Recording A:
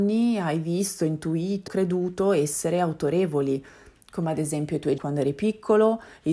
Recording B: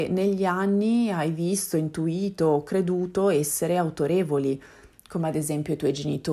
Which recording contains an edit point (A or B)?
A